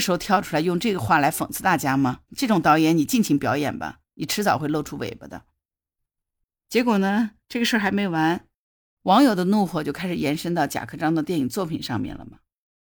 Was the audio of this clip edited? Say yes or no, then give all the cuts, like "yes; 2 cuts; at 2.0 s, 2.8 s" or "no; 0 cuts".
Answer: yes; 2 cuts; at 2.3 s, 7.4 s